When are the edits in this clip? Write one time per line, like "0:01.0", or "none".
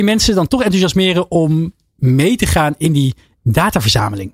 none